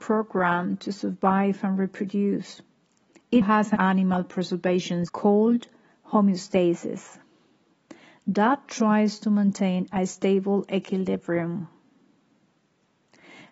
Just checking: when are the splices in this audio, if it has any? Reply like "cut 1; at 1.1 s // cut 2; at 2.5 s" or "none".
cut 1; at 3.4 s // cut 2; at 3.8 s // cut 3; at 5.1 s